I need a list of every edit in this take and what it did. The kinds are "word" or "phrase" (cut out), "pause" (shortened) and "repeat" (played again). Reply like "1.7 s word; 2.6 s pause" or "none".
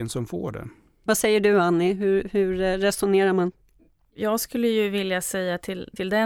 none